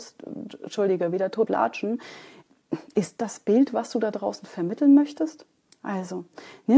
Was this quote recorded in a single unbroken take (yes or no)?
no